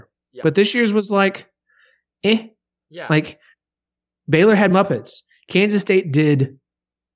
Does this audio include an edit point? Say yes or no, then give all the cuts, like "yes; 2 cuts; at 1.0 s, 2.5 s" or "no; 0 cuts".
no; 0 cuts